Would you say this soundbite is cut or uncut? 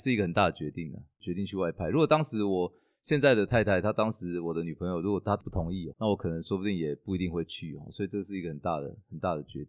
cut